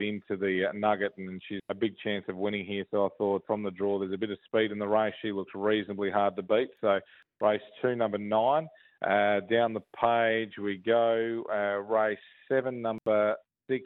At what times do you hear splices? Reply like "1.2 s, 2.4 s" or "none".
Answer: 1.6 s, 3.4 s